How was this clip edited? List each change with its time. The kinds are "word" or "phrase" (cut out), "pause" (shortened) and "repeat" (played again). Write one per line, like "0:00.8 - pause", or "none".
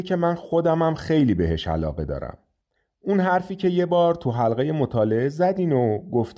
none